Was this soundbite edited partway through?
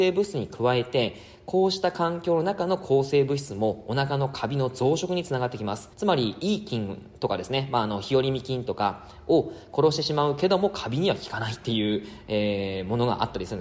yes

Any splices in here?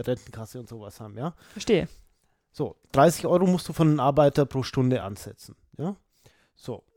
no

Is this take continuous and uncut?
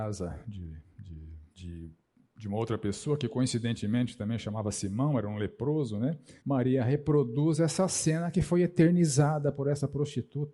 no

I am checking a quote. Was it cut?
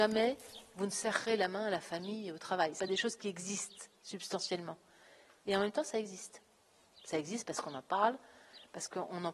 no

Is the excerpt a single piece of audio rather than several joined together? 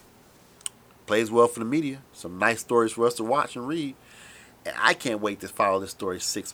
no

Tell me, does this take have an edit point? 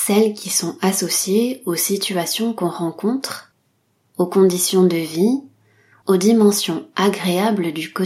no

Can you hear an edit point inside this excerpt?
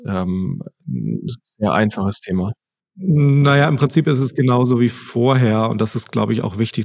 no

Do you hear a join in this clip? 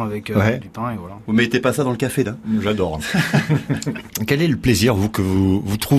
yes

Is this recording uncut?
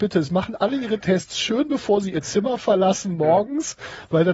yes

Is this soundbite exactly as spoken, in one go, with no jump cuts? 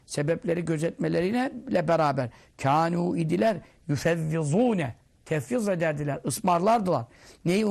yes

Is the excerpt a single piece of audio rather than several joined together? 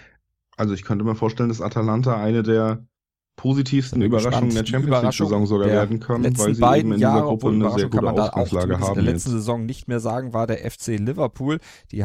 no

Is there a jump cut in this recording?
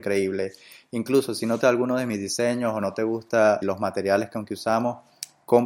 yes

